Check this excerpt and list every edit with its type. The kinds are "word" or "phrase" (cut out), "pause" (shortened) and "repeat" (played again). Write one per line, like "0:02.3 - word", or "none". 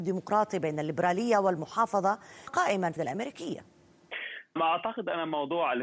0:02.5 - word
0:03.0 - phrase
0:04.6 - word